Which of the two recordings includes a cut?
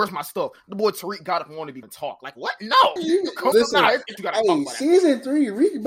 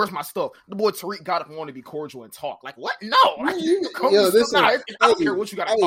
first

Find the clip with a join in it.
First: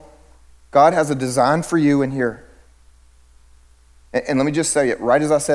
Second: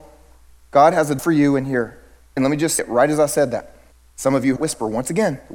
second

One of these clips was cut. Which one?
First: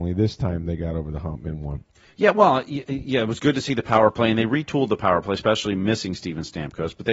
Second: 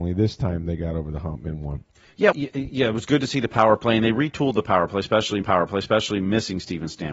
second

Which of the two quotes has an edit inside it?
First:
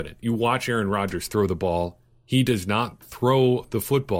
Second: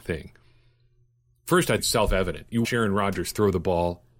second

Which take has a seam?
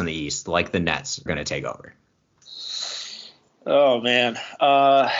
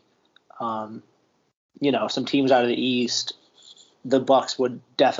first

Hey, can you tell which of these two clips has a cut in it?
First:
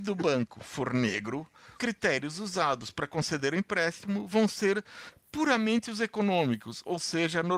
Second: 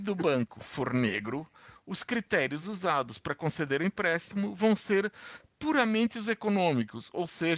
first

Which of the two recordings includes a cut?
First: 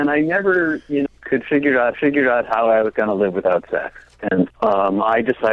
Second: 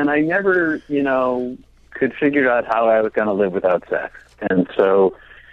first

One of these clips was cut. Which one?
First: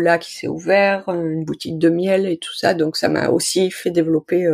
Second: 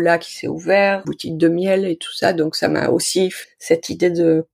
second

